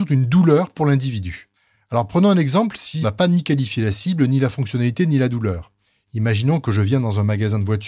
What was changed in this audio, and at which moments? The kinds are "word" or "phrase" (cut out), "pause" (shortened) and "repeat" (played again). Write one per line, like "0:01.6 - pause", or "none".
0:03.0 - word